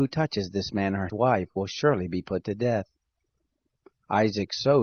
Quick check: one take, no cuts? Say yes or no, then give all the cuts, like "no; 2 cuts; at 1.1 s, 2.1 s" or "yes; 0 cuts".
no; 1 cut; at 1.1 s